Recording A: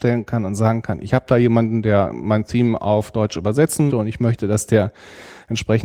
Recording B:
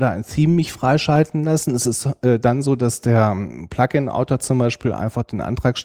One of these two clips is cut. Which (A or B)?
A